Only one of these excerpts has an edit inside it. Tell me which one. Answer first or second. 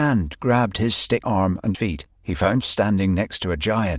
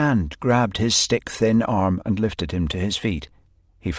first